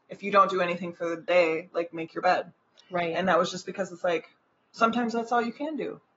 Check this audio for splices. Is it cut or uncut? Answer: uncut